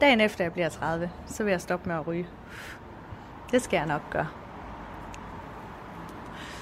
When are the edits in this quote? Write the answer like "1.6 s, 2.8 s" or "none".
none